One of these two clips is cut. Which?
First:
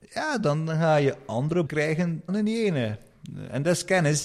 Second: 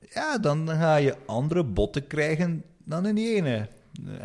first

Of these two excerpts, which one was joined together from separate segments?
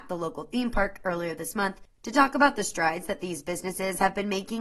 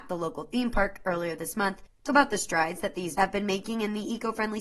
second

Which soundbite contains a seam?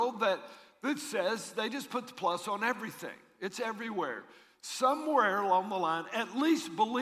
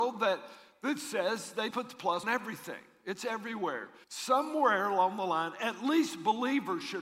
second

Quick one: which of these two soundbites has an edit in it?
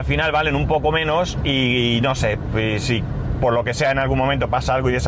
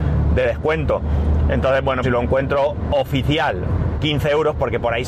second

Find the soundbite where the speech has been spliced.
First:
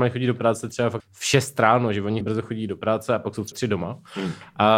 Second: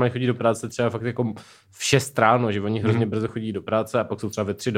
first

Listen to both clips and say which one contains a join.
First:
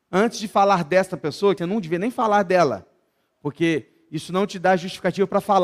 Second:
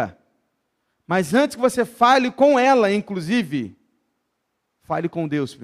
first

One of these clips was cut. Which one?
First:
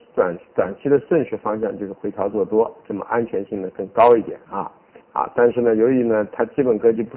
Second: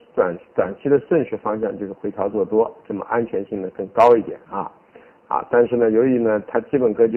first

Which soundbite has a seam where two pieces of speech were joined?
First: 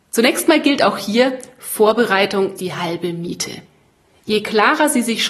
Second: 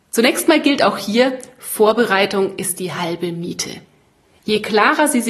first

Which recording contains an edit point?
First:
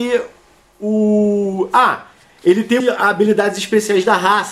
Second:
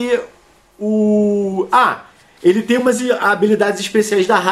first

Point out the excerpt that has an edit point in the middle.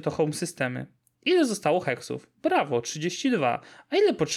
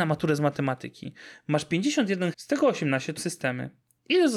second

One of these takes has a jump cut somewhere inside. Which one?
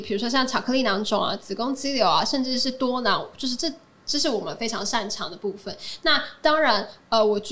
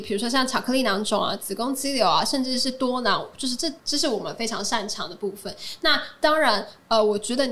second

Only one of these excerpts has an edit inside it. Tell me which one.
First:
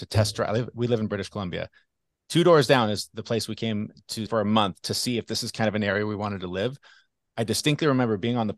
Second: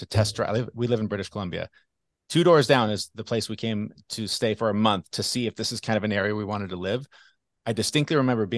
first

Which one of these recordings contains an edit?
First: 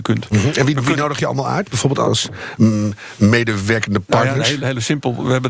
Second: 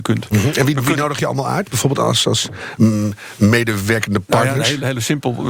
first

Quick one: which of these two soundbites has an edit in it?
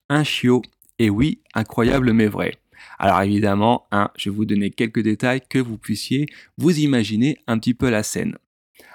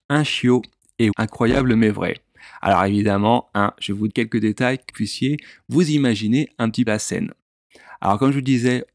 second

